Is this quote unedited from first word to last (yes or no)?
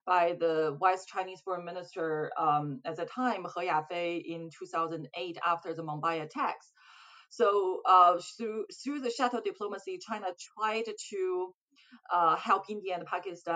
yes